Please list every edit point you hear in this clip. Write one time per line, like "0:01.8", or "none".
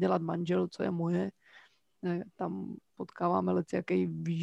none